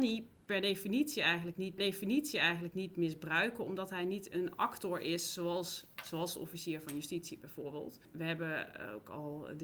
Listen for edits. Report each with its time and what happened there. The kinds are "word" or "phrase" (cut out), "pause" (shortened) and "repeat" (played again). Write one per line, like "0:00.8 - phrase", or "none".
0:01.8 - repeat